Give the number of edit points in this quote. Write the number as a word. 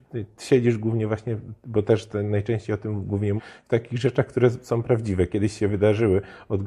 one